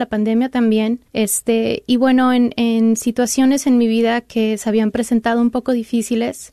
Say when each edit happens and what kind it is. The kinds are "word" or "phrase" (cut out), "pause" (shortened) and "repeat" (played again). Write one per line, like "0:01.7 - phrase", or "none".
0:01.1 - pause